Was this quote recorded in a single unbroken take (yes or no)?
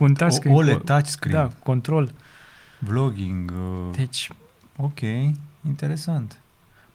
yes